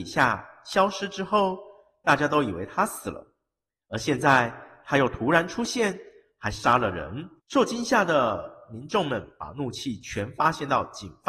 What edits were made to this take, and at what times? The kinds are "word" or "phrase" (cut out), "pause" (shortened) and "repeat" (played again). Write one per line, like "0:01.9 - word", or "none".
0:07.4 - pause